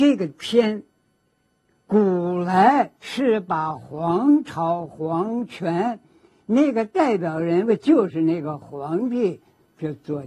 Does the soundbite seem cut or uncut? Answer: cut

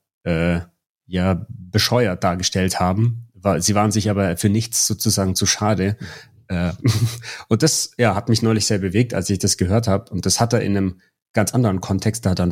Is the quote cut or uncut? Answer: uncut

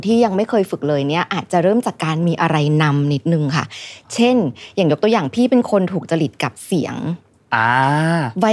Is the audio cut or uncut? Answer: uncut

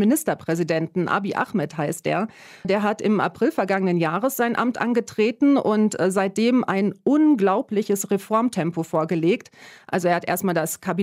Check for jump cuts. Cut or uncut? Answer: uncut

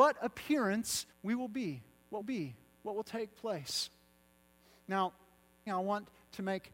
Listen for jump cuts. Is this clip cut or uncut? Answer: cut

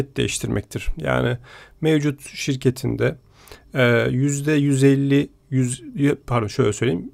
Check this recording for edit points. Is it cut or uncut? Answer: uncut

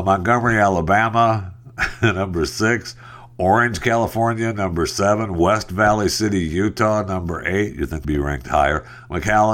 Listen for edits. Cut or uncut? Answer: cut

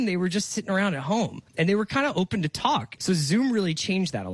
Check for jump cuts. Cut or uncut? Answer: cut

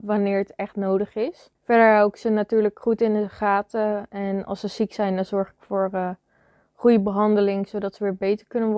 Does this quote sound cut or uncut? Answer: uncut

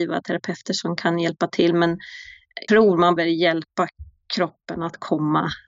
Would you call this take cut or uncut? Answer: cut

